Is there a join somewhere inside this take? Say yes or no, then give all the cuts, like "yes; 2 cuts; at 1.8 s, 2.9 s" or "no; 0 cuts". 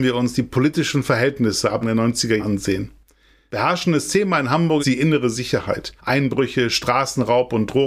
yes; 4 cuts; at 1.8 s, 2.4 s, 4.8 s, 6.0 s